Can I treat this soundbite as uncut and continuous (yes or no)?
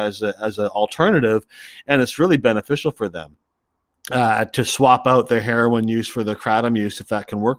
yes